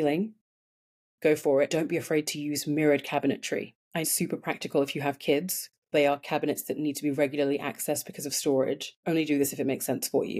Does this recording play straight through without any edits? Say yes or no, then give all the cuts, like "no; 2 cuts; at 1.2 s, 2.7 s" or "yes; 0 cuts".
no; 4 cuts; at 1.7 s, 4.0 s, 5.9 s, 9.0 s